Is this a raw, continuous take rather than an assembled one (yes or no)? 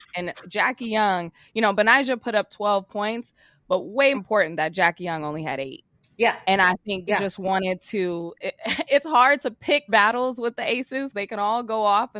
no